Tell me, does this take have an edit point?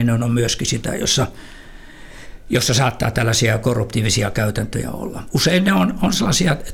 no; 0 cuts

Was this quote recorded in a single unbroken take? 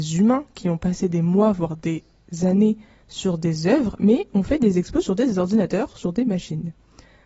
yes; 0 cuts

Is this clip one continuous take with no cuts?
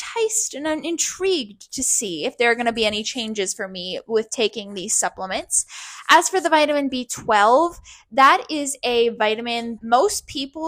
no; 1 cut; at 9.8 s

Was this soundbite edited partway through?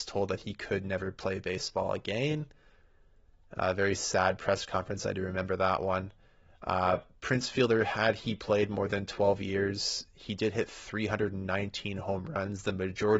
no; 0 cuts

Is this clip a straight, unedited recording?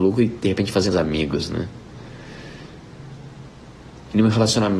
no; 1 cut; at 0.9 s

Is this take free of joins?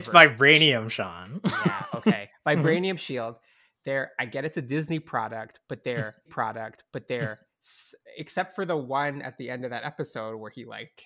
no; 1 cut; at 6.3 s

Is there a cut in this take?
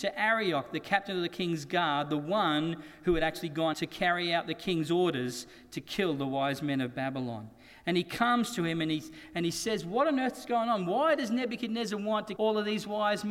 yes; 2 cuts; at 3.7 s, 12.4 s

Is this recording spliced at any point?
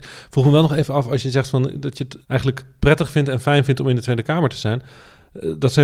yes; 1 cut; at 2.2 s

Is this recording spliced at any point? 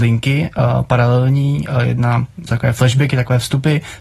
yes; 1 cut; at 2.5 s

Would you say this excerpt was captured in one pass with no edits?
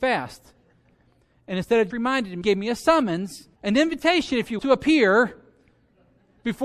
no; 4 cuts; at 1.9 s, 2.4 s, 3.6 s, 4.6 s

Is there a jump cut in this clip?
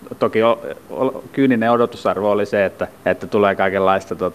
yes; 1 cut; at 2.9 s

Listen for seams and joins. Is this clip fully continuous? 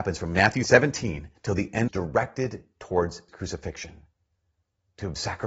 no; 3 cuts; at 1.4 s, 1.9 s, 3.3 s

